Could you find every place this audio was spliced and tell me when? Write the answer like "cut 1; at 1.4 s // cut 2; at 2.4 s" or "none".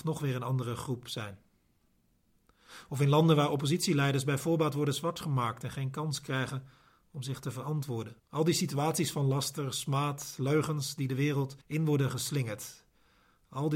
cut 1; at 8.2 s // cut 2; at 11.6 s

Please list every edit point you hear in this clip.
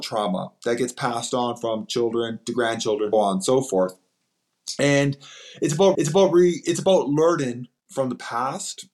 cut 1; at 3.1 s // cut 2; at 5.9 s

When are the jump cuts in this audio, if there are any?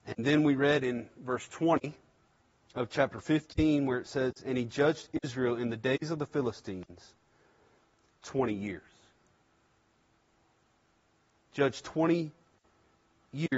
cut 1; at 2.4 s

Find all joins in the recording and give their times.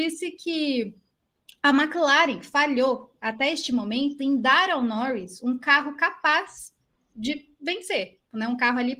none

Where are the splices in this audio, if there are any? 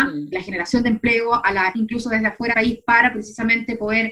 cut 1; at 1.7 s // cut 2; at 2.5 s

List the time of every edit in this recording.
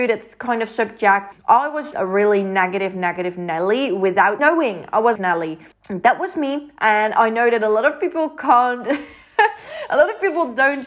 cut 1; at 1.3 s // cut 2; at 1.9 s // cut 3; at 4.4 s // cut 4; at 5.2 s // cut 5; at 5.7 s

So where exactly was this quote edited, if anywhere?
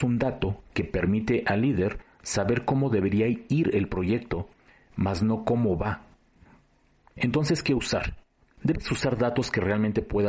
none

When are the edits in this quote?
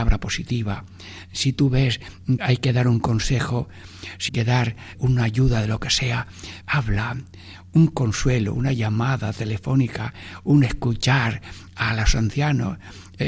cut 1; at 2.4 s // cut 2; at 4.3 s // cut 3; at 4.9 s // cut 4; at 6.6 s

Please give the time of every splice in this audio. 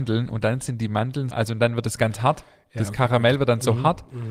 cut 1; at 1.3 s

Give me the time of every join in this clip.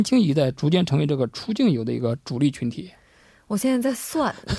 none

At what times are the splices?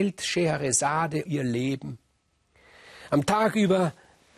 cut 1; at 1.2 s

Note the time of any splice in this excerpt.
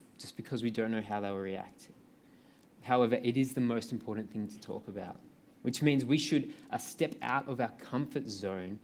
none

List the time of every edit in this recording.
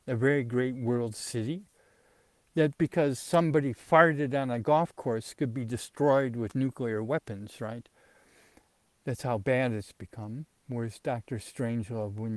cut 1; at 2.8 s

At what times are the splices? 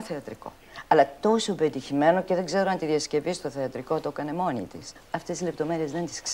cut 1; at 5.0 s

